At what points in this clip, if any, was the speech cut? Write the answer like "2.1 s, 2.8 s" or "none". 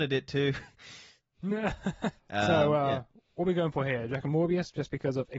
none